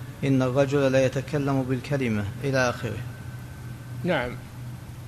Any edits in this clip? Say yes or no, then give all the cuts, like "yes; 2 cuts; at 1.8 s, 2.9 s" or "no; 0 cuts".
yes; 1 cut; at 2.4 s